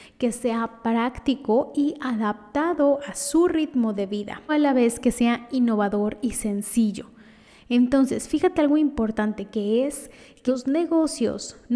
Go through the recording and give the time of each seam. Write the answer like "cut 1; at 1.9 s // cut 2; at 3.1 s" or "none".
cut 1; at 4.5 s // cut 2; at 10.5 s

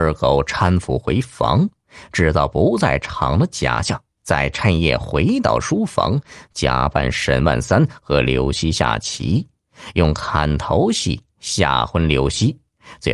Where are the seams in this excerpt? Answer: cut 1; at 4.2 s

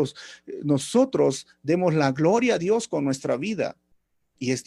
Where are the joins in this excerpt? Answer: none

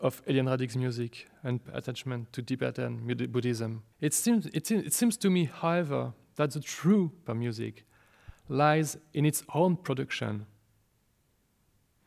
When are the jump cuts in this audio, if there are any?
cut 1; at 1.6 s // cut 2; at 3.9 s // cut 3; at 7.3 s

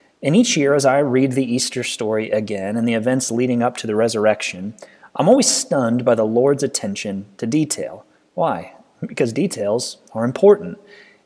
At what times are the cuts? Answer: none

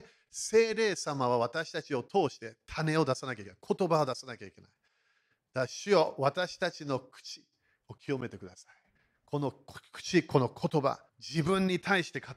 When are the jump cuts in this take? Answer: cut 1; at 9.0 s // cut 2; at 11.1 s

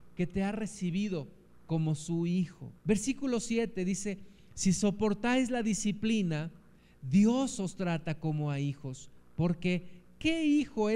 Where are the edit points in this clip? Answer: cut 1; at 2.8 s

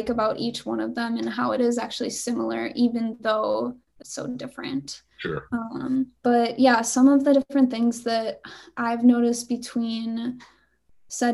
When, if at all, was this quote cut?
cut 1; at 4.0 s // cut 2; at 6.2 s

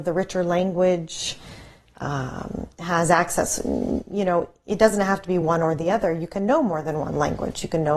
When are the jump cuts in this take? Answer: none

